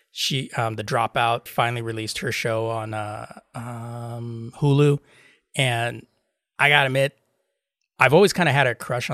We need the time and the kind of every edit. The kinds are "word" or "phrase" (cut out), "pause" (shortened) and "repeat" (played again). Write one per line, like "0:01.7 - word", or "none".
0:01.5 - phrase
0:02.9 - phrase